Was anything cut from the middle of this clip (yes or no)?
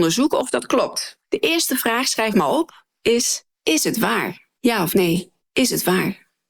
yes